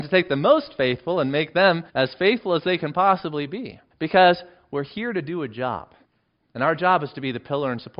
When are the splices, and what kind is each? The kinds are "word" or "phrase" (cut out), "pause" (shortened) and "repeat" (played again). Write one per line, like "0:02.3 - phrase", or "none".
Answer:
0:01.9 - pause
0:03.9 - pause
0:06.0 - pause